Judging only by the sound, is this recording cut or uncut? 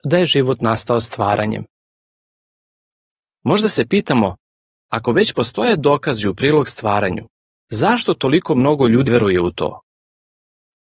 cut